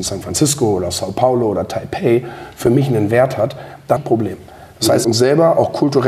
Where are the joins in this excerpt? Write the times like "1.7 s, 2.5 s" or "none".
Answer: 4.0 s, 5.0 s

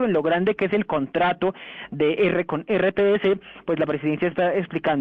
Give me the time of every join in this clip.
none

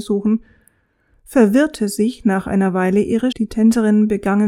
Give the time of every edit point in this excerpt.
3.3 s

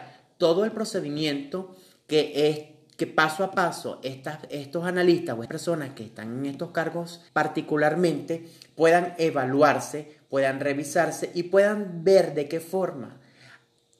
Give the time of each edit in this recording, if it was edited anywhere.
5.5 s, 7.3 s

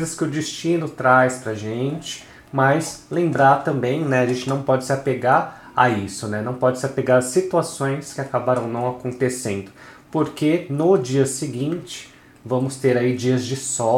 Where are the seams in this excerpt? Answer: none

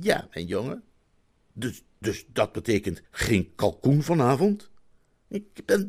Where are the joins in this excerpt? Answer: 3.1 s

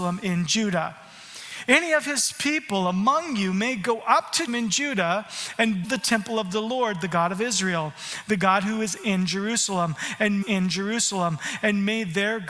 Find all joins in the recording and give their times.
4.5 s, 5.8 s, 10.4 s

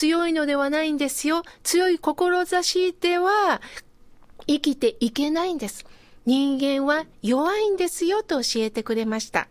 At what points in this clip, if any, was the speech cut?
none

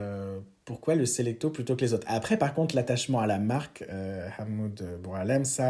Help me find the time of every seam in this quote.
none

